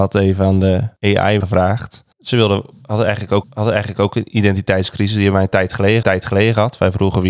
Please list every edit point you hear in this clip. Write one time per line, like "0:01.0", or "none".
0:01.4
0:02.1
0:03.4
0:06.0